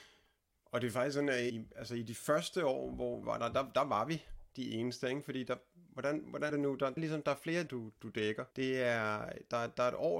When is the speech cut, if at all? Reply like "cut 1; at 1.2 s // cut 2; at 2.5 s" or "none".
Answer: cut 1; at 1.5 s // cut 2; at 3.2 s // cut 3; at 6.5 s // cut 4; at 7.0 s // cut 5; at 7.7 s // cut 6; at 8.0 s // cut 7; at 8.5 s